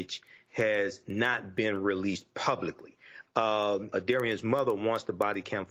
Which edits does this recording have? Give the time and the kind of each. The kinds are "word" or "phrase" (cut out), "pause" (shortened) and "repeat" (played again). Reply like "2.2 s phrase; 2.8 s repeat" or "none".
3.9 s phrase